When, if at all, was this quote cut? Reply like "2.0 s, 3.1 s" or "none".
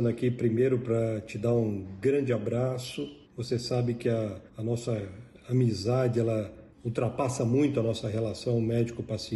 3.2 s, 4.5 s, 6.7 s